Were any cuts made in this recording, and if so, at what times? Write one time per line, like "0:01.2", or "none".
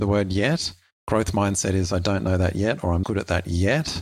0:03.0